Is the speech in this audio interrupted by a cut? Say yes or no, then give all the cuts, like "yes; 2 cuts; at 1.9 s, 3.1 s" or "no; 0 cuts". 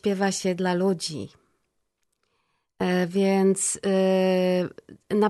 no; 0 cuts